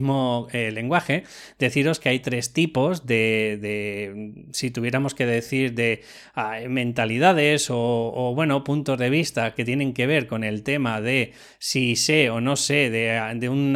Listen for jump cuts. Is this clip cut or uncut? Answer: uncut